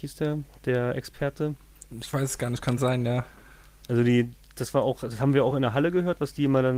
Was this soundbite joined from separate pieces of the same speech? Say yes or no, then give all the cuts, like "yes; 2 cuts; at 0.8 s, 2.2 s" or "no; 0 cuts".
no; 0 cuts